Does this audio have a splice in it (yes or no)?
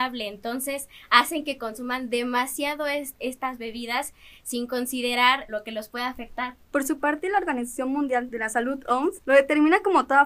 yes